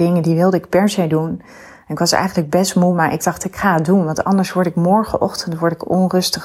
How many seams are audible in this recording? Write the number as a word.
zero